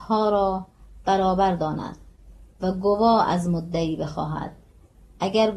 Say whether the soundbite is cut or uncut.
uncut